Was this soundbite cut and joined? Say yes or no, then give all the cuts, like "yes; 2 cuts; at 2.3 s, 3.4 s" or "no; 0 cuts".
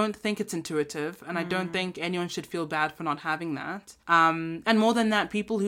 yes; 1 cut; at 4.0 s